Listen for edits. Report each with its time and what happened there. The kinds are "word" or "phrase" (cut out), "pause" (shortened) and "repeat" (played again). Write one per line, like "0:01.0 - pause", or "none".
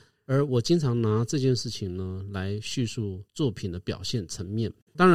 0:03.3 - pause